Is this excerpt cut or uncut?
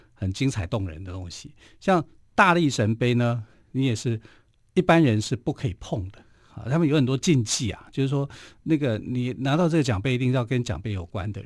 uncut